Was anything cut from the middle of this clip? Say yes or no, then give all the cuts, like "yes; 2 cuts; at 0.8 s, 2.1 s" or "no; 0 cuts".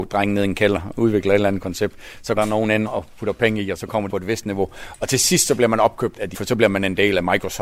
yes; 4 cuts; at 2.4 s, 2.9 s, 4.1 s, 6.3 s